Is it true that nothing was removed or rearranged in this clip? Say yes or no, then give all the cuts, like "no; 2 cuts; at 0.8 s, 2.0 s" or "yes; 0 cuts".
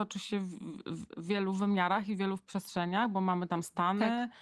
yes; 0 cuts